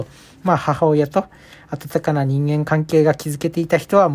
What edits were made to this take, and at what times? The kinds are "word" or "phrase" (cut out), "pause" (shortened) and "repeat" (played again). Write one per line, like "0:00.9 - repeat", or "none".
none